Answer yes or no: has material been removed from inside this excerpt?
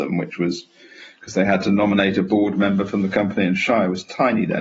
no